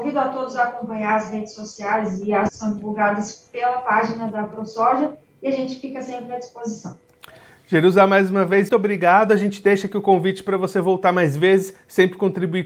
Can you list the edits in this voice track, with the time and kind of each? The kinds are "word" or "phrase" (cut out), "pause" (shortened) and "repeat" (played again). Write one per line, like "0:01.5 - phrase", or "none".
0:02.5 - word
0:08.7 - word